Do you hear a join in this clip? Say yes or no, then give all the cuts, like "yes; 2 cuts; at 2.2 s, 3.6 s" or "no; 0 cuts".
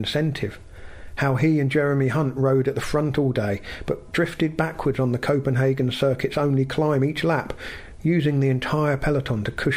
no; 0 cuts